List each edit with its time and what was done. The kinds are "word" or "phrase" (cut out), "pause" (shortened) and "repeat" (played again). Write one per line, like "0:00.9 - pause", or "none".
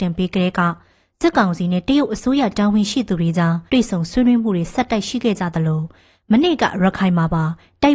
0:03.7 - pause